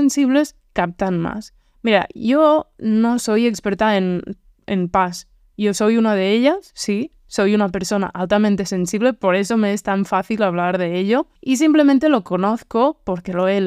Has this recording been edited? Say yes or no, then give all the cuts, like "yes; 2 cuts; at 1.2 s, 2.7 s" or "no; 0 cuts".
yes; 1 cut; at 11.4 s